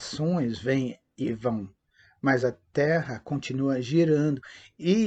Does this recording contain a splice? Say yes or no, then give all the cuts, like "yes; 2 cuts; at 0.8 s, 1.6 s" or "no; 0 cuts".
no; 0 cuts